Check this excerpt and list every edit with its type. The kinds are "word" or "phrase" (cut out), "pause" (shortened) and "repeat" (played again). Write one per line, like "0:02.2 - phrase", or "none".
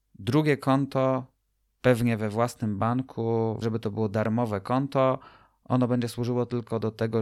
0:03.6 - word